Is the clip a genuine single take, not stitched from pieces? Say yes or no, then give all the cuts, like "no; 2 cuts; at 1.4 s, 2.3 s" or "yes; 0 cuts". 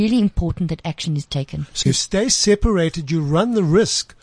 no; 1 cut; at 1.8 s